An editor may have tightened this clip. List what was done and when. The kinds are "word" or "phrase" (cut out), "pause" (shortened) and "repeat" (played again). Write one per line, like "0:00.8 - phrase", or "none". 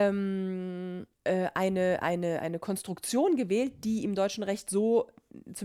0:01.1 - pause